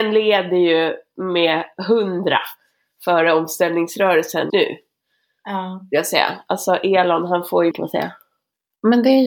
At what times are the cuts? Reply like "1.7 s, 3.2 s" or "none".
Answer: 4.5 s, 7.7 s